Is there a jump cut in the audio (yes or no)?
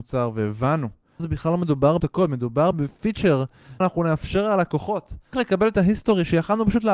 yes